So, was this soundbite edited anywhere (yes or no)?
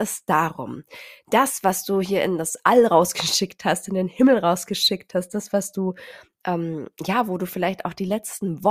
no